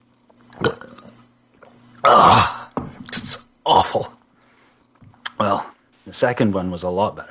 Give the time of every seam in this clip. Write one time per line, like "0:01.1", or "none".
none